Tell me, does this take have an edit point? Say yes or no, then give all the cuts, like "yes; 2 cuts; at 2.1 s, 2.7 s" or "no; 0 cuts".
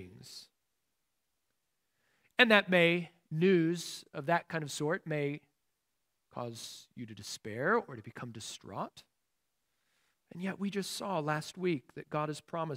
no; 0 cuts